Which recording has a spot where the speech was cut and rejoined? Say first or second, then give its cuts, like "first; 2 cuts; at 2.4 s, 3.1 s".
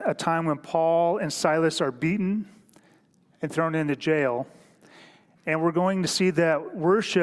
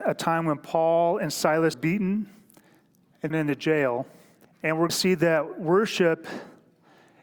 second; 4 cuts; at 1.7 s, 3.3 s, 4.4 s, 4.9 s